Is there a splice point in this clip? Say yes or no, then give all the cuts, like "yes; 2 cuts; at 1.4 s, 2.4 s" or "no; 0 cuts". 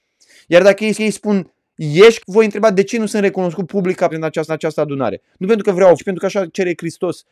yes; 5 cuts; at 0.9 s, 2.2 s, 4.1 s, 4.5 s, 6.0 s